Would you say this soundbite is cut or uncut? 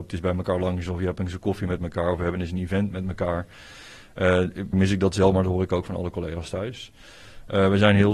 cut